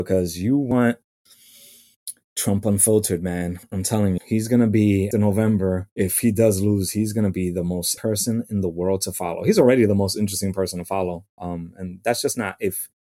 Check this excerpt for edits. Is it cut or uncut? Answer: cut